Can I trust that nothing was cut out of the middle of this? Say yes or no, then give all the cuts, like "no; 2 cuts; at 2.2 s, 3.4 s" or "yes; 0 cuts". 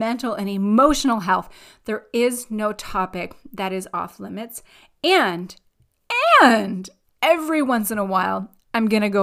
yes; 0 cuts